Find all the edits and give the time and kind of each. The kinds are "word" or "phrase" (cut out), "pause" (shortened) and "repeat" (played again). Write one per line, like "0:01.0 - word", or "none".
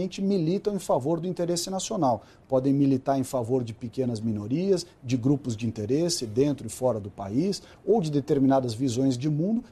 none